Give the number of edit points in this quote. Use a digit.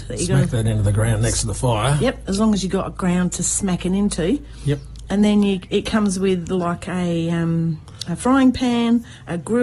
0